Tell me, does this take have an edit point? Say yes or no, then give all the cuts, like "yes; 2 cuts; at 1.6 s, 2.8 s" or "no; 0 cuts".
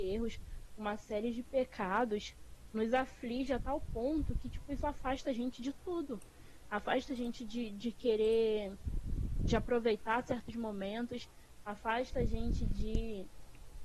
no; 0 cuts